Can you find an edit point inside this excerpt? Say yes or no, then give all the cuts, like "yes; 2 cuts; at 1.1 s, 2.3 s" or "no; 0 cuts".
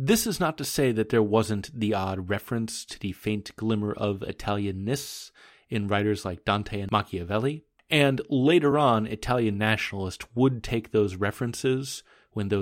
no; 0 cuts